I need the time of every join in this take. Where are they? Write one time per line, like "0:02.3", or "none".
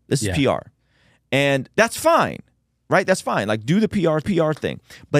0:04.2